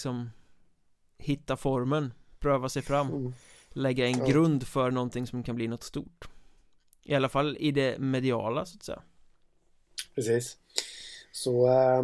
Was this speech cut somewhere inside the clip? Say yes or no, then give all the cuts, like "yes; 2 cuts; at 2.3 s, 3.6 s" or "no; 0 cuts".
no; 0 cuts